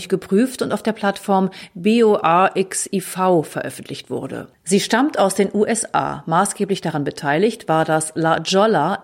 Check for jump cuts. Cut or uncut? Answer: uncut